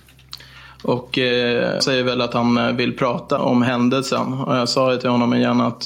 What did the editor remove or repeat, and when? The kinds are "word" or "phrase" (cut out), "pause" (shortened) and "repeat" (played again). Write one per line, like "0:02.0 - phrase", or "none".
0:01.8 - word
0:03.4 - word